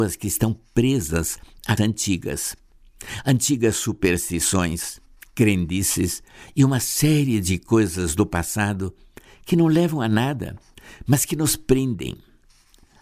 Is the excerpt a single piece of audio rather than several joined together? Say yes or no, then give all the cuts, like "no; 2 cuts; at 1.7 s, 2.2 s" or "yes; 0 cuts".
no; 1 cut; at 1.8 s